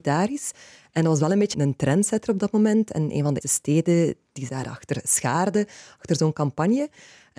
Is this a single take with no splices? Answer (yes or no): no